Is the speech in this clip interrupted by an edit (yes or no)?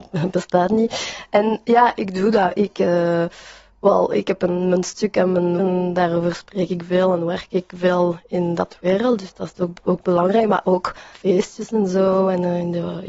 yes